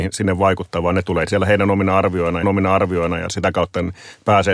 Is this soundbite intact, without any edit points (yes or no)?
no